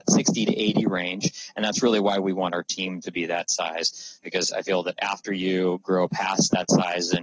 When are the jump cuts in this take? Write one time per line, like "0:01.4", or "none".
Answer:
0:04.2